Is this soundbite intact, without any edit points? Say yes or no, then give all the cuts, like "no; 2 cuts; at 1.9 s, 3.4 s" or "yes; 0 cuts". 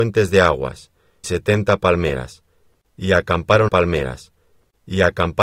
no; 2 cuts; at 1.2 s, 3.7 s